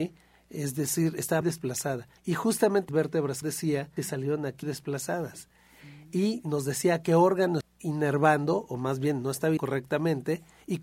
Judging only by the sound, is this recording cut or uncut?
cut